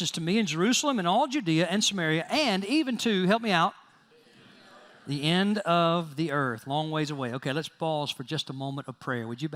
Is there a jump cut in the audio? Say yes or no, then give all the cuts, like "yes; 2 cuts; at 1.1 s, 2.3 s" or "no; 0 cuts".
no; 0 cuts